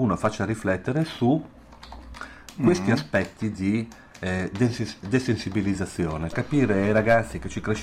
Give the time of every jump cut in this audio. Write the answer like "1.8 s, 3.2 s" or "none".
6.3 s

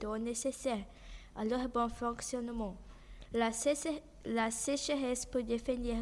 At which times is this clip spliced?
none

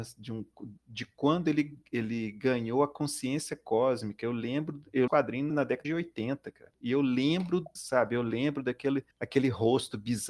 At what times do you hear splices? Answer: 5.1 s, 5.5 s, 5.8 s, 7.8 s, 9.1 s

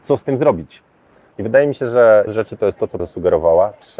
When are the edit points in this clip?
2.3 s, 3.0 s

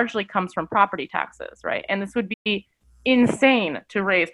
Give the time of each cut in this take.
none

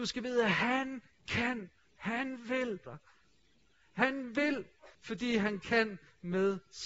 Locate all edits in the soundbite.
2.9 s, 4.9 s

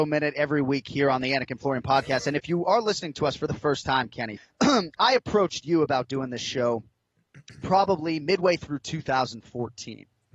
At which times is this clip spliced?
4.4 s

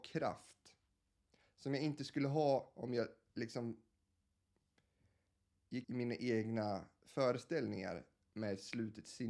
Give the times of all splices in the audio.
5.8 s

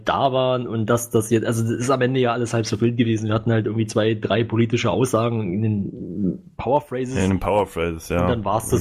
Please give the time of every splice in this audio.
none

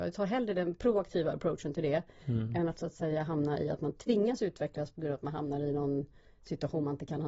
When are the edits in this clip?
none

